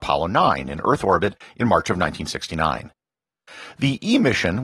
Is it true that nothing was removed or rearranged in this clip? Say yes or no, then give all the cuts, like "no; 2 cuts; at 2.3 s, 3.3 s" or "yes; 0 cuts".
yes; 0 cuts